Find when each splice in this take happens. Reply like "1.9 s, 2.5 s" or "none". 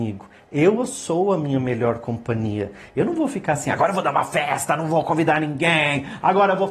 none